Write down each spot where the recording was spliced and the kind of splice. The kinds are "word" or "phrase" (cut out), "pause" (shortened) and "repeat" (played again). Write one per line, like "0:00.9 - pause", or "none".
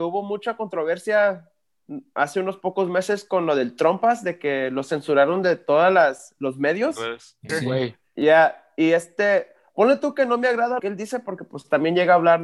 0:07.5 - word
0:10.8 - word